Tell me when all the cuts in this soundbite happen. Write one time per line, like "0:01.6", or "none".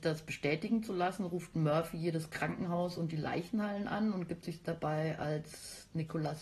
none